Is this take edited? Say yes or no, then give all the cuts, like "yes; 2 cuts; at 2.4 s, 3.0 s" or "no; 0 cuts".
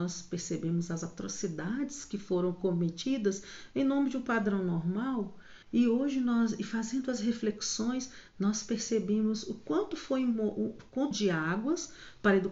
yes; 2 cuts; at 5.6 s, 11.1 s